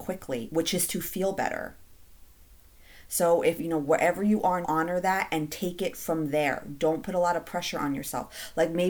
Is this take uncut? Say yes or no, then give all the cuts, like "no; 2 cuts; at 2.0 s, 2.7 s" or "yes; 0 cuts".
no; 2 cuts; at 3.6 s, 4.6 s